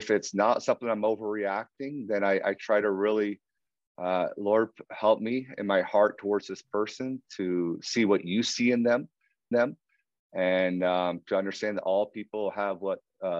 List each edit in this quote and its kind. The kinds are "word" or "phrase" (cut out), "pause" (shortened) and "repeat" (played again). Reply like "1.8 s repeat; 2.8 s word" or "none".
9.5 s repeat